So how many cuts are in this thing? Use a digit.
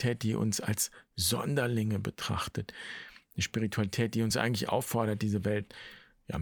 0